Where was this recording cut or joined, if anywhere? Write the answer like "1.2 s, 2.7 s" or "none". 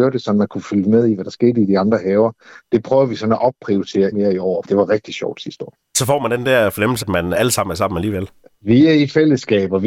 4.1 s, 4.6 s, 7.0 s